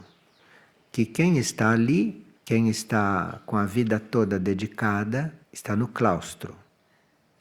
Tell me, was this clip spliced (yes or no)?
yes